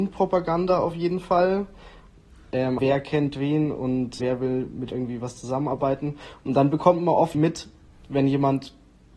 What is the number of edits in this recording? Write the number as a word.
four